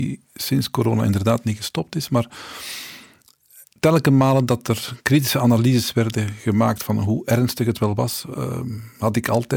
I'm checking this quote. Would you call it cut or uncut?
uncut